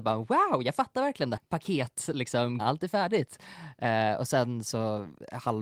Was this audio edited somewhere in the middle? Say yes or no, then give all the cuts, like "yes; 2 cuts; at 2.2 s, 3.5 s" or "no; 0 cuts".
yes; 2 cuts; at 1.4 s, 2.6 s